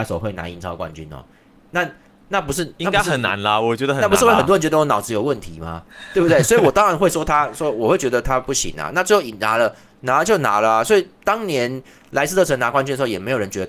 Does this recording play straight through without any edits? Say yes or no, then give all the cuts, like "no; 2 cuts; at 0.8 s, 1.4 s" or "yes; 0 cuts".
yes; 0 cuts